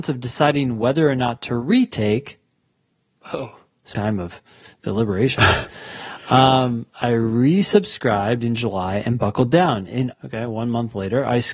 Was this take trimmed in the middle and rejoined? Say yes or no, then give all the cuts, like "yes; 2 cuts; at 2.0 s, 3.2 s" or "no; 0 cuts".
yes; 2 cuts; at 3.9 s, 10.1 s